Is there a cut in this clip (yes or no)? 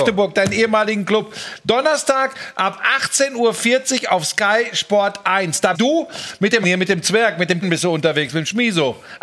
yes